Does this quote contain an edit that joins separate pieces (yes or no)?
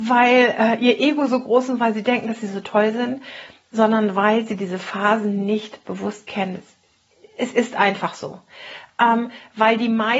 no